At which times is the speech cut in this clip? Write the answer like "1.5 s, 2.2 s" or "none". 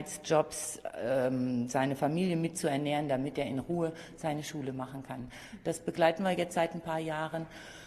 none